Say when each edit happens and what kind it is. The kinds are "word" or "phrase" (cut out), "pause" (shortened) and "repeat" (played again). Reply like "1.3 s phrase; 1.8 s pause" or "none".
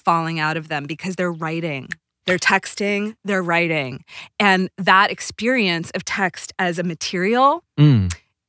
none